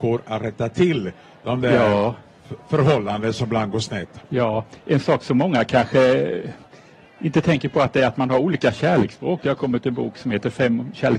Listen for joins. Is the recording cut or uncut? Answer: uncut